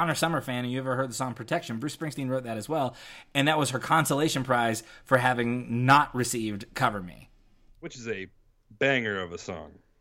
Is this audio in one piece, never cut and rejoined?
yes; 0 cuts

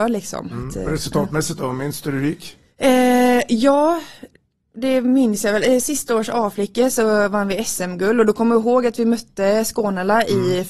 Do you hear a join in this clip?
no; 0 cuts

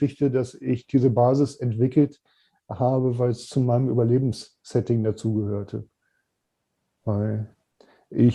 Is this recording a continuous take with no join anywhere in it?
yes; 0 cuts

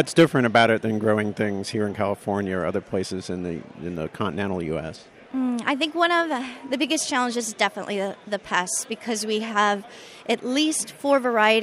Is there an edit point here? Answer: no; 0 cuts

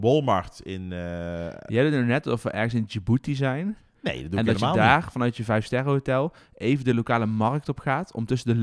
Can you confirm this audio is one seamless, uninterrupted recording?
yes; 0 cuts

